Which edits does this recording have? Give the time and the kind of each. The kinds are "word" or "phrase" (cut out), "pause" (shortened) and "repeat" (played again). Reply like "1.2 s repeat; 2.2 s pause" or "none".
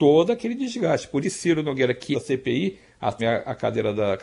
1.2 s word; 2.1 s phrase; 3.2 s word